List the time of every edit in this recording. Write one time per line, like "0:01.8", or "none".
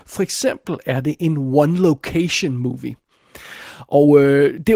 none